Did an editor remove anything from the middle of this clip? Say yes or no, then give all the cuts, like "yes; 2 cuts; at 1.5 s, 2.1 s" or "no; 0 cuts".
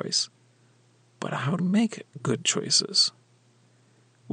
yes; 1 cut; at 1.6 s